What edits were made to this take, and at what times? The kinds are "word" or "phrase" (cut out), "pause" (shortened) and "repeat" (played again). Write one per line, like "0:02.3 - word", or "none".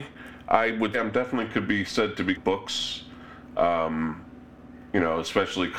0:00.9 - word
0:02.4 - word